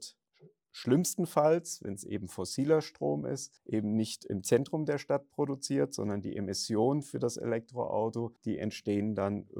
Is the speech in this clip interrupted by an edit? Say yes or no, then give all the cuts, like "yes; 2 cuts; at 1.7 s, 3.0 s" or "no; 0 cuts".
yes; 2 cuts; at 3.6 s, 8.4 s